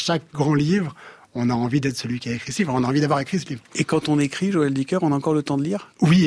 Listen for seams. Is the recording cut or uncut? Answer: uncut